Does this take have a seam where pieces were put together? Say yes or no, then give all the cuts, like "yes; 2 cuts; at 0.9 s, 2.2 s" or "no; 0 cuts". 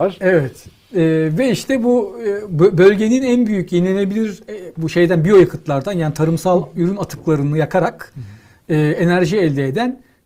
no; 0 cuts